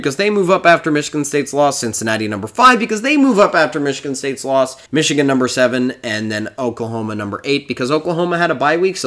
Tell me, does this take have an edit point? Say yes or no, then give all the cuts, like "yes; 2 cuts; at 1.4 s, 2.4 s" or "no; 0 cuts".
yes; 1 cut; at 4.9 s